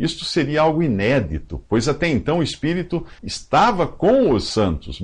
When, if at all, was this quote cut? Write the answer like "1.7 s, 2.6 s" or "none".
3.2 s